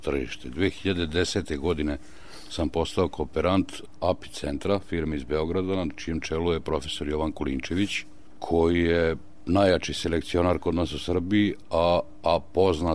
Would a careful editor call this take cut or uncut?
uncut